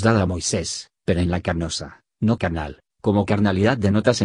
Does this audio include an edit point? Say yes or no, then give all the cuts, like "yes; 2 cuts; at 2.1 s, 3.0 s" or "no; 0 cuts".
no; 0 cuts